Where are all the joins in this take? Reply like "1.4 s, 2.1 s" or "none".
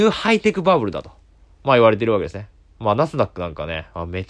none